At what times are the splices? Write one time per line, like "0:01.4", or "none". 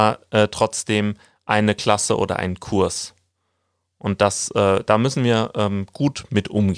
none